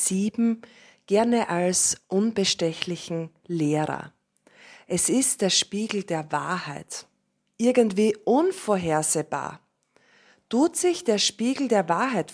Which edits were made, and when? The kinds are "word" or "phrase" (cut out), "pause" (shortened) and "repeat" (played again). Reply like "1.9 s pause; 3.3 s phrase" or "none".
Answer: none